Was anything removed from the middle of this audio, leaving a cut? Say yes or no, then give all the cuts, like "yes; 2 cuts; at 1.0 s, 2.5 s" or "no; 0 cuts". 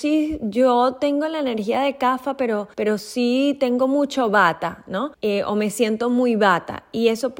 yes; 2 cuts; at 2.7 s, 5.1 s